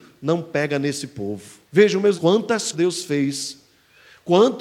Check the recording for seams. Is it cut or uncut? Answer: cut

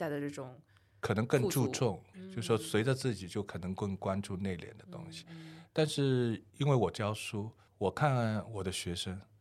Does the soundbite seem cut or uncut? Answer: uncut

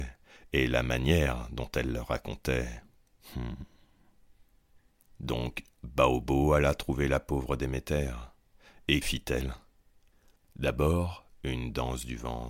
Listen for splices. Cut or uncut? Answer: cut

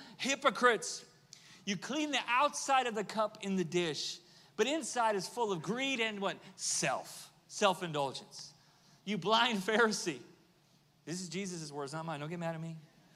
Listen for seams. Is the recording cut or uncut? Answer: uncut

